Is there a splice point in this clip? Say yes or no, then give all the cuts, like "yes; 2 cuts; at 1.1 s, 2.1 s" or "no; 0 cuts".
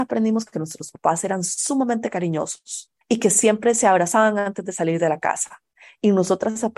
yes; 1 cut; at 3.0 s